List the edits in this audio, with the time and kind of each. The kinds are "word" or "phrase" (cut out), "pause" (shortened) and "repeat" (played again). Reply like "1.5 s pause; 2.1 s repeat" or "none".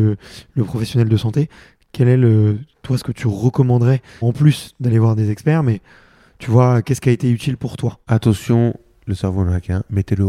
4.2 s word